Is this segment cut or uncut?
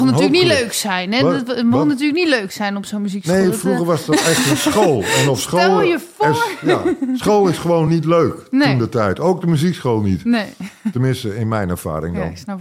uncut